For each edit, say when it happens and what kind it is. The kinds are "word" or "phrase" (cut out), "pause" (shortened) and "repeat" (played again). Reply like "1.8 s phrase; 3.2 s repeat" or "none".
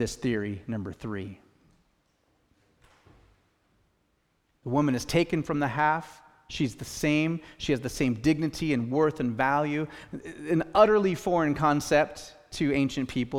none